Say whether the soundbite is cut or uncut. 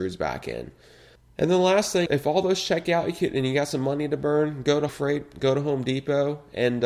cut